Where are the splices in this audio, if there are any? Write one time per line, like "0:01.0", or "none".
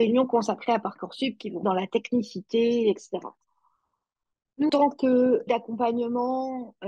0:01.6
0:04.7
0:05.5